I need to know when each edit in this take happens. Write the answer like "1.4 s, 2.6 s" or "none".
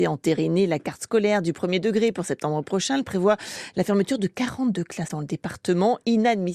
5.1 s